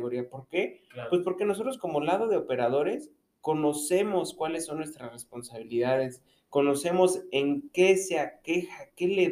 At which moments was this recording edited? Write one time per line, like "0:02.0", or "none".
none